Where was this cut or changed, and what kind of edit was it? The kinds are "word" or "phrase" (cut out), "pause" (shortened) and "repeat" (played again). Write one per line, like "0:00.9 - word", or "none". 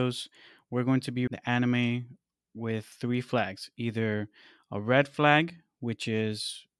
0:01.3 - word

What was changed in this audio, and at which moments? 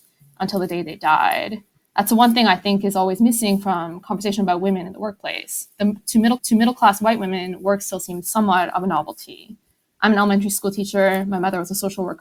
0:06.4 - repeat

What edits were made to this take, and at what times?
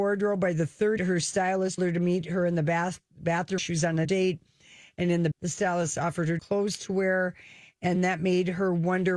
0:01.0 - word
0:01.8 - word
0:03.6 - word
0:04.0 - word
0:05.3 - word
0:06.4 - word
0:08.0 - word

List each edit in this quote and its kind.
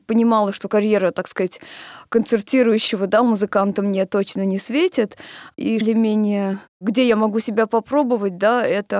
0:05.8 - phrase
0:06.7 - pause

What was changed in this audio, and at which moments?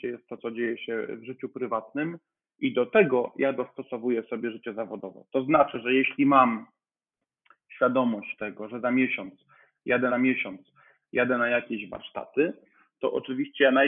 0:10.1 - repeat

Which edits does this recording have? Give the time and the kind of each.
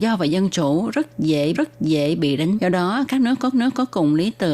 0:01.5 - repeat
0:02.6 - word
0:03.5 - repeat

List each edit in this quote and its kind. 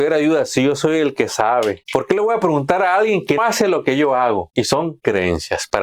0:03.4 - word

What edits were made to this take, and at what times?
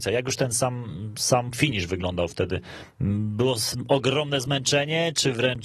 none

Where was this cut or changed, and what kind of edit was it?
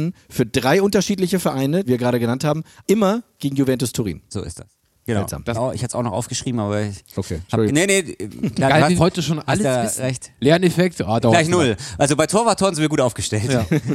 0:01.8 - word
0:02.8 - word
0:05.5 - phrase
0:07.7 - word
0:09.0 - word

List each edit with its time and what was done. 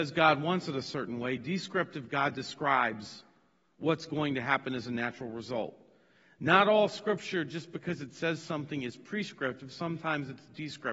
none

